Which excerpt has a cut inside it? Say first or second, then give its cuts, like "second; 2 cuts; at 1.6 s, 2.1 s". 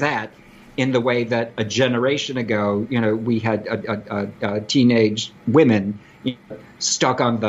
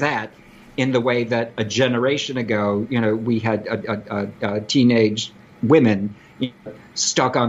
first; 1 cut; at 5.4 s